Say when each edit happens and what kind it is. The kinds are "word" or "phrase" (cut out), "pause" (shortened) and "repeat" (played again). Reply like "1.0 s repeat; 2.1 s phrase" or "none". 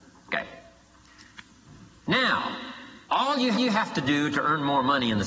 3.0 s pause; 3.5 s repeat